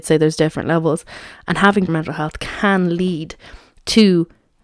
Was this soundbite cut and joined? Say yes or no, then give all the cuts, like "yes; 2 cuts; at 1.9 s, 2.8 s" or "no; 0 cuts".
yes; 1 cut; at 1.9 s